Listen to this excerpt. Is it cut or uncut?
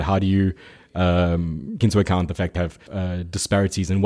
cut